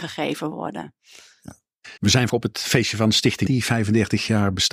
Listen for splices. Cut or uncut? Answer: cut